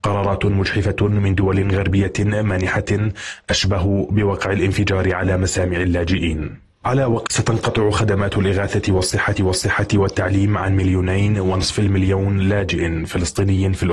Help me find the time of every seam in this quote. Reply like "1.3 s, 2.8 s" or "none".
7.3 s, 9.4 s